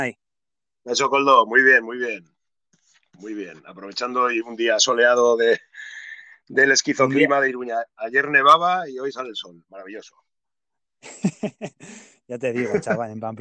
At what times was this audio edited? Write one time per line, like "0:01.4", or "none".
none